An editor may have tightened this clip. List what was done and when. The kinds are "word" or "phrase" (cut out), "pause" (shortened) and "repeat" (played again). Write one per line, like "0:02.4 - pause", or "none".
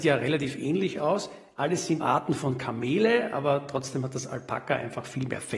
0:02.0 - word